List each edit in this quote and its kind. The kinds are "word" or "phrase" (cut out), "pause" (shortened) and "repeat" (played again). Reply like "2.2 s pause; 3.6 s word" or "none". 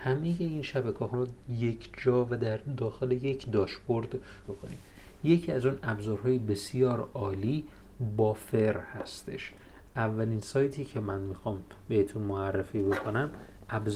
1.1 s word; 4.4 s word